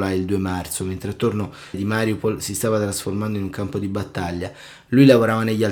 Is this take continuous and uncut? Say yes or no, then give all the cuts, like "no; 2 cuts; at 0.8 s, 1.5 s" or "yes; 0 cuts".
no; 1 cut; at 1.7 s